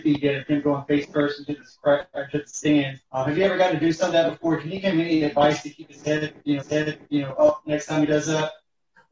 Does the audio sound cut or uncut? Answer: cut